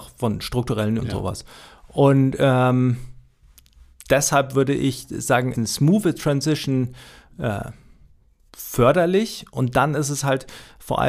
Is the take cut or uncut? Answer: cut